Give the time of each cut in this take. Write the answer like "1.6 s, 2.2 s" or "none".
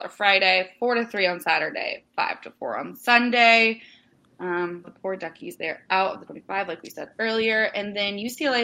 4.8 s, 6.3 s